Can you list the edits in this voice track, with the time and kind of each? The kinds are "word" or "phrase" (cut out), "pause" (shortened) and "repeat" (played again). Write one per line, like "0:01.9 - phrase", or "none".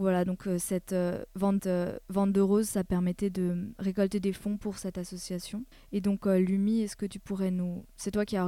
0:01.6 - repeat
0:05.7 - pause